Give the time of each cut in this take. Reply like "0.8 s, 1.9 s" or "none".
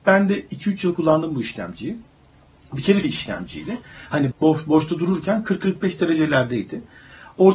0.9 s, 3.0 s, 4.3 s